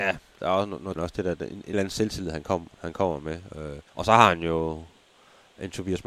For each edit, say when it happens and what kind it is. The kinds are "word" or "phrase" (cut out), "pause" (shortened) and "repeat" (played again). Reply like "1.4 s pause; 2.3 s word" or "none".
1.0 s phrase; 1.7 s word; 3.9 s pause

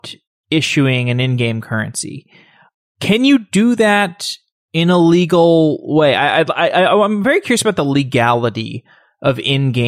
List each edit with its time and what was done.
none

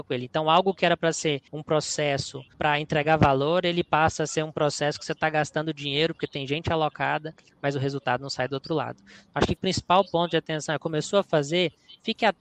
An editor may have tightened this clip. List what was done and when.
1.5 s pause; 2.5 s pause; 9.6 s word

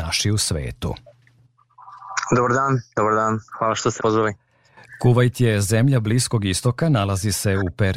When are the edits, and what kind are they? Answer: 3.5 s pause; 4.0 s word

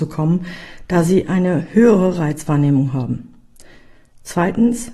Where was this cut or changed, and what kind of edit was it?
none

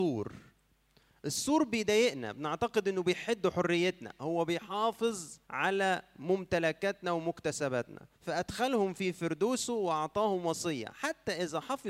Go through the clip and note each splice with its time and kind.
5.4 s pause; 8.1 s pause

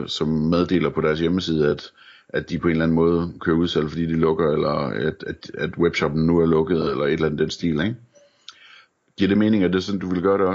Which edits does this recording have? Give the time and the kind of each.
none

